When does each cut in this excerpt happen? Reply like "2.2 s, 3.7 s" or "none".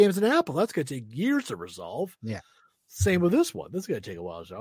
none